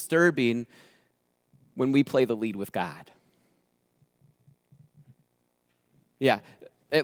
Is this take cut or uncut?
uncut